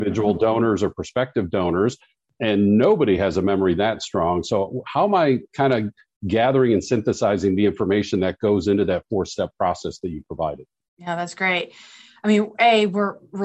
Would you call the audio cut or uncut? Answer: uncut